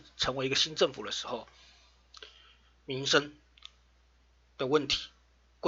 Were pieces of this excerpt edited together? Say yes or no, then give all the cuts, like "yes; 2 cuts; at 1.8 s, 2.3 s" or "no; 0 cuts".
no; 0 cuts